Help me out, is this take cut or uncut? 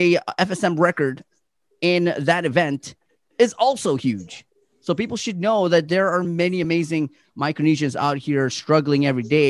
uncut